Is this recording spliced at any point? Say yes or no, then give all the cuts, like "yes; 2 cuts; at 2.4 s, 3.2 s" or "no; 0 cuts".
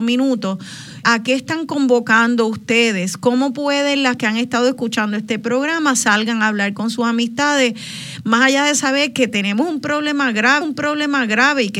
yes; 3 cuts; at 1.0 s, 4.2 s, 10.6 s